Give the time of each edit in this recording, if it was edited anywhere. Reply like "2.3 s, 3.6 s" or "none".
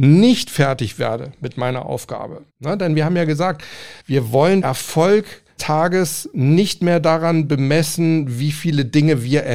2.5 s, 4.0 s, 4.6 s, 5.6 s